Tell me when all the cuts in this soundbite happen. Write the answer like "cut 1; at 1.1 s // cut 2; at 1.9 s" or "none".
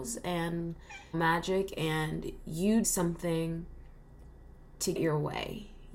cut 1; at 1.1 s // cut 2; at 2.8 s // cut 3; at 5.0 s